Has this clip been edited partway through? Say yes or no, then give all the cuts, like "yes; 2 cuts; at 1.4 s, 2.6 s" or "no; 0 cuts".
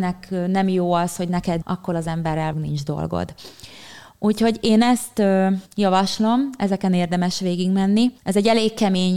yes; 5 cuts; at 1.6 s, 1.9 s, 2.5 s, 5.7 s, 8.2 s